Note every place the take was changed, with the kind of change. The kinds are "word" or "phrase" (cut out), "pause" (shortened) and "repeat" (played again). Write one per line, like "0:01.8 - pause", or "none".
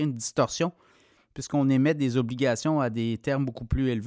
none

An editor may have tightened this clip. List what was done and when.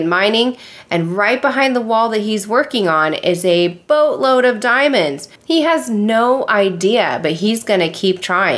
0:05.4 - pause

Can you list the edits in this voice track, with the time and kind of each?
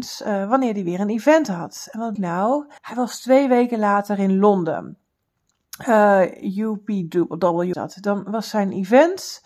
0:02.2 - word
0:02.8 - pause
0:07.7 - word

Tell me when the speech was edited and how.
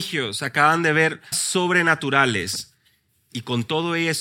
0:01.3 - word

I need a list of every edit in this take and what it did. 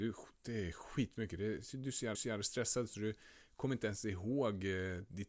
0:02.1 - repeat

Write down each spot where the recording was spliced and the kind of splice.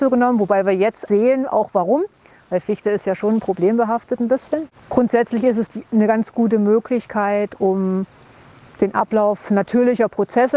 0:01.1 - word
0:05.7 - word

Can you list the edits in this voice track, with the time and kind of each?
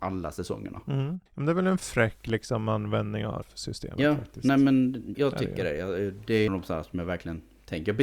0:01.3 - pause
0:03.4 - word
0:05.1 - word
0:06.5 - phrase

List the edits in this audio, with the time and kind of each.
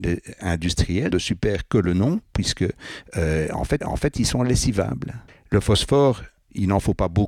0:01.1 - phrase
0:03.8 - repeat
0:05.3 - pause

